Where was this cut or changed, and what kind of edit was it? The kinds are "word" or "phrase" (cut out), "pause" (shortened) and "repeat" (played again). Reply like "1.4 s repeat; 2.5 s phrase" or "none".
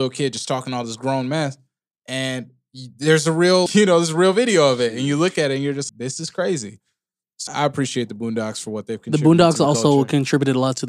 3.7 s word; 5.9 s word; 7.5 s word

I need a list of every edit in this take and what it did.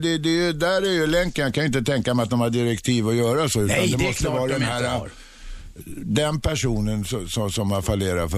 none

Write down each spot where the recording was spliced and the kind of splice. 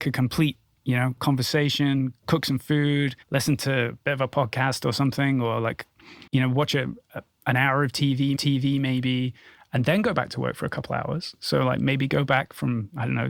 1.2 s phrase; 3.2 s pause; 6.3 s pause; 8.4 s repeat

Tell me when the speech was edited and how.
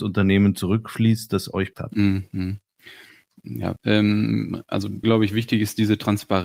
1.7 s word; 3.8 s phrase; 5.0 s word

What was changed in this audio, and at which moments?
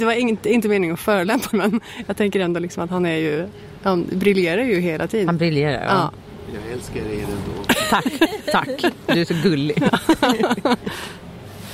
1.5 s phrase

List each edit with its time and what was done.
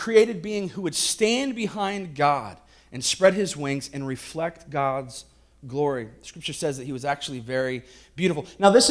none

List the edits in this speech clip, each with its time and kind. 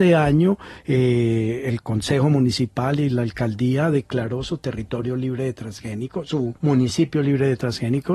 6.6 s pause

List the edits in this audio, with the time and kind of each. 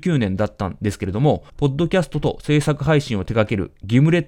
1.6 s phrase

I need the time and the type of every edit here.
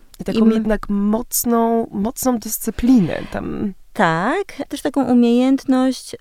4.7 s phrase

